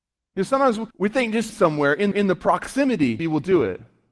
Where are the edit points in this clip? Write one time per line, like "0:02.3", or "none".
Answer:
0:00.9
0:01.5
0:02.1
0:03.2